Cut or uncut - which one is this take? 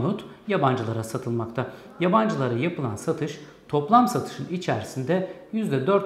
uncut